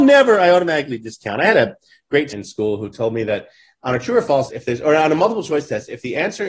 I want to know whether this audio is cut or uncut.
cut